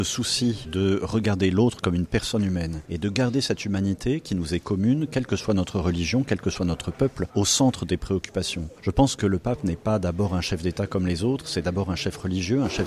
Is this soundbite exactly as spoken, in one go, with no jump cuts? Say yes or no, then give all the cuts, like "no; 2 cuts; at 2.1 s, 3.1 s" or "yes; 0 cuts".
yes; 0 cuts